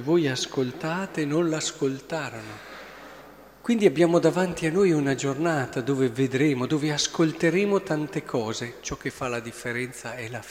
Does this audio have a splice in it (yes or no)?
no